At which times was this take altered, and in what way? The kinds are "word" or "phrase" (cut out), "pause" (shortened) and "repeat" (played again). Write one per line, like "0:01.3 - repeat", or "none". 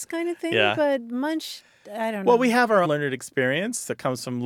0:02.8 - word